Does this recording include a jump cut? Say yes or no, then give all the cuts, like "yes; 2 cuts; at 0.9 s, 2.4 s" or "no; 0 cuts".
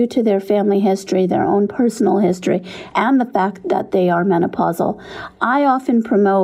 no; 0 cuts